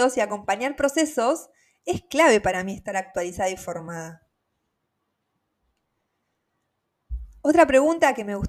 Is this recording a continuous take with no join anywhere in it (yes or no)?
yes